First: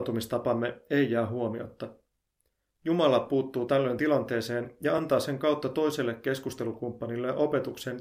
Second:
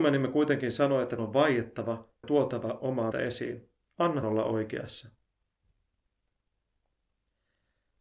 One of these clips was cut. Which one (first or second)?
second